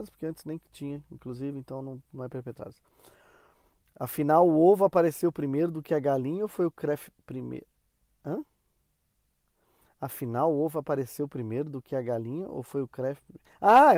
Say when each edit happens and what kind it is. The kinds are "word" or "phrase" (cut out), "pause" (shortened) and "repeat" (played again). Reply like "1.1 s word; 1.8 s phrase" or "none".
none